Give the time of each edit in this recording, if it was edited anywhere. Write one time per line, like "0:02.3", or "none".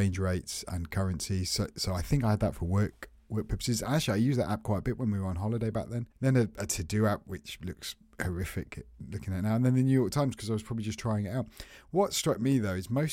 0:06.1